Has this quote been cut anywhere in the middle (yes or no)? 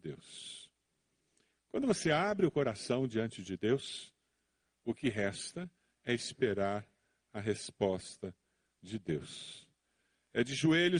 no